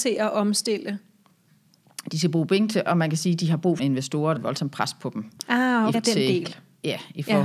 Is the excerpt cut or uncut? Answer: cut